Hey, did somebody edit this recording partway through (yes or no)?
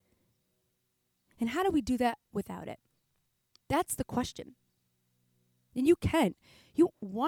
yes